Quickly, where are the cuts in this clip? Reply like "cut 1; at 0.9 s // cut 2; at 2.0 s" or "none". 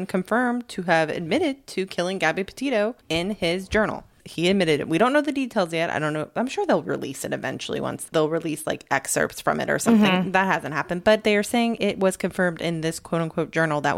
cut 1; at 3.0 s